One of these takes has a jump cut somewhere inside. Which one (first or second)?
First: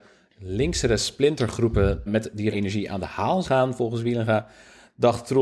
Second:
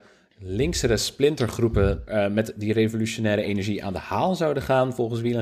first